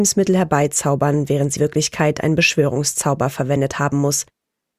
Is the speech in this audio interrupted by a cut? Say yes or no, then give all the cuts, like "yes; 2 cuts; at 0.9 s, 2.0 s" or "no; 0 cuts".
yes; 1 cut; at 1.6 s